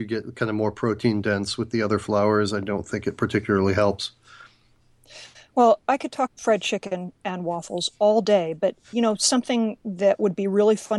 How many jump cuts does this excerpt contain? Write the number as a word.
one